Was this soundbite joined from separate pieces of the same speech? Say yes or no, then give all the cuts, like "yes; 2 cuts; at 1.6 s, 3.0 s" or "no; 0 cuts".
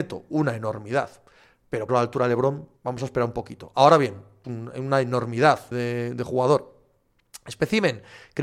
yes; 4 cuts; at 1.9 s, 2.8 s, 4.4 s, 5.7 s